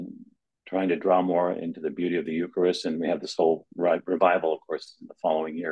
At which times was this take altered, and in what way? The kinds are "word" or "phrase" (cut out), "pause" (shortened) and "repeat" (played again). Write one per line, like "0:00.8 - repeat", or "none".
none